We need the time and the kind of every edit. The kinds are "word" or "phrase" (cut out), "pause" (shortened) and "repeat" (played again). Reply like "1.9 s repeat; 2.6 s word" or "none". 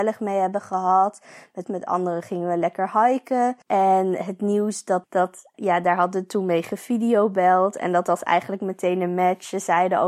1.6 s phrase; 3.6 s pause; 5.0 s phrase; 5.5 s word